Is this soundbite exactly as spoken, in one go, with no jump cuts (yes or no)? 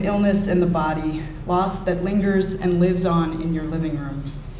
yes